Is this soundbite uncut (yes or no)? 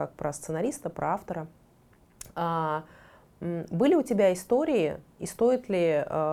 yes